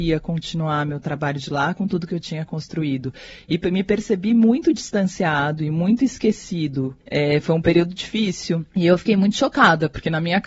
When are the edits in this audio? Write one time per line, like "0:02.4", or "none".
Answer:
0:07.0
0:08.7